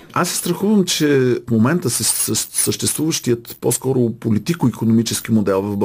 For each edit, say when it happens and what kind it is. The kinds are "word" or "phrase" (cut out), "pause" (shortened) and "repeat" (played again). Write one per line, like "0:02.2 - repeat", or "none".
none

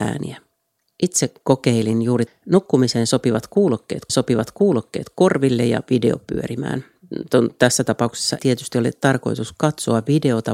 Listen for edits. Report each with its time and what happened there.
0:02.3 - phrase
0:04.1 - repeat
0:08.4 - word

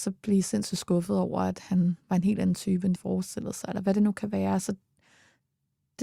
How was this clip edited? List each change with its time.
0:02.9 - phrase

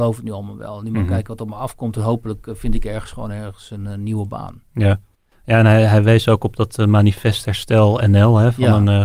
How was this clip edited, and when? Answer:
none

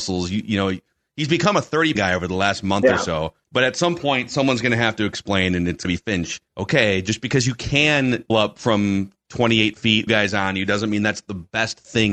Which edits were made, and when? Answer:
0:01.9 - phrase
0:03.4 - pause
0:05.8 - word
0:06.5 - pause
0:08.3 - word
0:10.1 - phrase

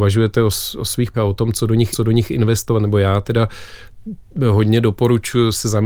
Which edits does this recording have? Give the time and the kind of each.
0:01.1 - word
0:01.9 - repeat

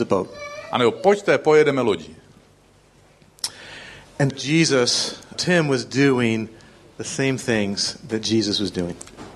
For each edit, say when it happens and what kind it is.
0:04.3 - word
0:05.3 - word

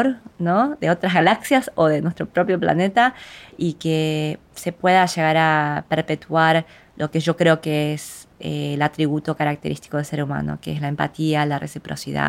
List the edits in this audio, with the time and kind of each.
none

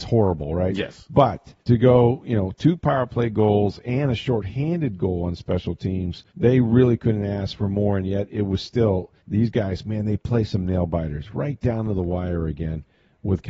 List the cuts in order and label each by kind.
0:01.6 - pause
0:06.3 - pause
0:09.2 - pause

